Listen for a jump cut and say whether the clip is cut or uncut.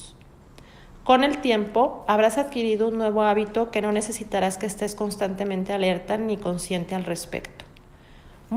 uncut